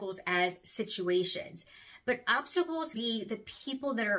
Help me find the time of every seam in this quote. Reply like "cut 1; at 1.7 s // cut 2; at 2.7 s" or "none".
cut 1; at 2.9 s